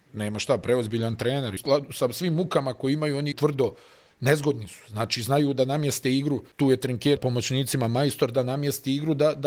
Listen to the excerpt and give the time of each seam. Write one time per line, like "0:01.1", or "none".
0:01.6
0:03.3
0:06.5
0:07.2